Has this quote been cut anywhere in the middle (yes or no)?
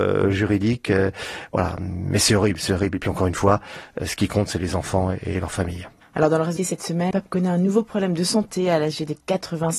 yes